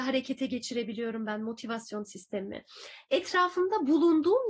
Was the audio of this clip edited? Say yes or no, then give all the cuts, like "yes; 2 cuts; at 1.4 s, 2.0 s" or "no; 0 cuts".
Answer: no; 0 cuts